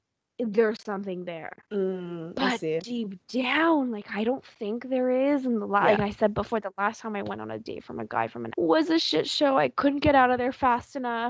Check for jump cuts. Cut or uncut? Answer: cut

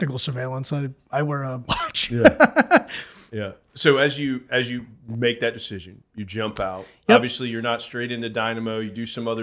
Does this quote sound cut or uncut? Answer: cut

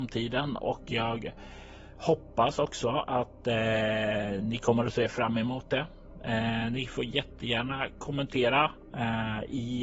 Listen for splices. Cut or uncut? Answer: uncut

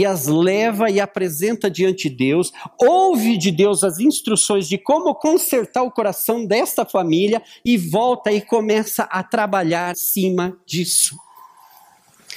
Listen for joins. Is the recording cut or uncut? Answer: cut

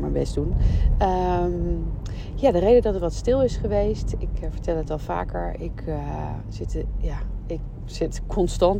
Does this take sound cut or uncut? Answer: uncut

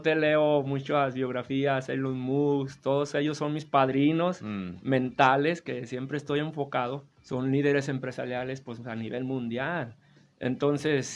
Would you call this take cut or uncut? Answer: cut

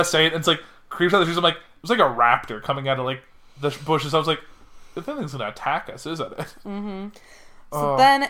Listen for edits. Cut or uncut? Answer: uncut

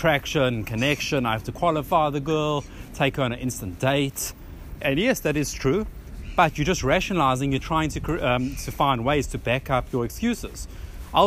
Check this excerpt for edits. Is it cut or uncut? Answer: uncut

